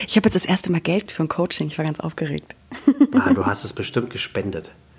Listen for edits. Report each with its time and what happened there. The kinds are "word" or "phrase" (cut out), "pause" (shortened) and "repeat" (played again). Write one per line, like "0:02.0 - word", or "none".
0:01.1 - word